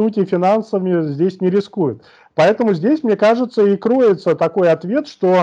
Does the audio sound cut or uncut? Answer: uncut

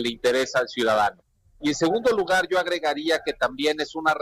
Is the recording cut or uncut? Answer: uncut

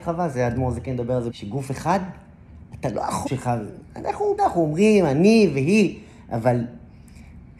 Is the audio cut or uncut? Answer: cut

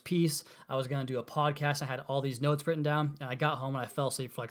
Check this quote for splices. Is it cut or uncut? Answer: uncut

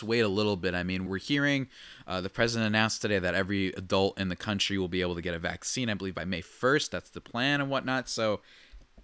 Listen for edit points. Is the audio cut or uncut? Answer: cut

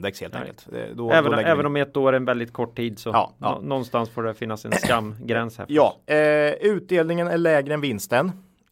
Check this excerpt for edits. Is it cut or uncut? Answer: uncut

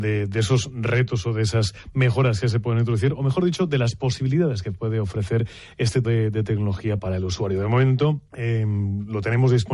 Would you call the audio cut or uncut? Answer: cut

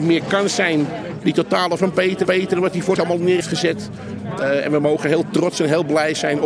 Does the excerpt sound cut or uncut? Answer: cut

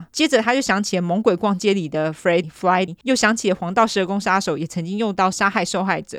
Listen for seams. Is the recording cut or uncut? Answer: cut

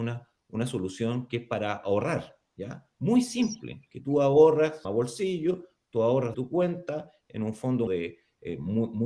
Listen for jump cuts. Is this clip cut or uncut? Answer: cut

